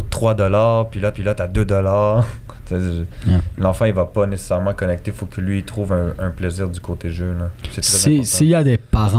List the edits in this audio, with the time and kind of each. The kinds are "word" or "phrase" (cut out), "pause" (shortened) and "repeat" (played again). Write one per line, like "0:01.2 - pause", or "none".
0:01.1 - repeat